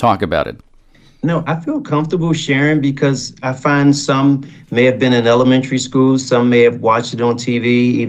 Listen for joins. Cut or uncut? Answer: cut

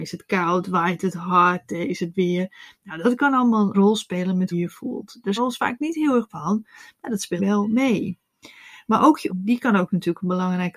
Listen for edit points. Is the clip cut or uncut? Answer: cut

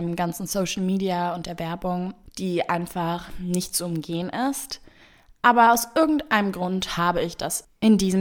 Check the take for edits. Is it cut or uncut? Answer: uncut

